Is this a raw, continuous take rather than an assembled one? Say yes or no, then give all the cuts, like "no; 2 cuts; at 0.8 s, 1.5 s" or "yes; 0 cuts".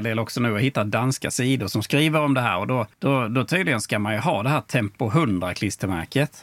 no; 1 cut; at 2.9 s